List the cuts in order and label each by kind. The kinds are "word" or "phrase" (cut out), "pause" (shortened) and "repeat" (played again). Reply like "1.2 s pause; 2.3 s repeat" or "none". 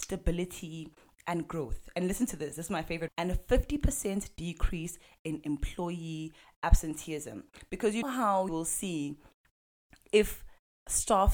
3.1 s word; 8.0 s word; 8.5 s word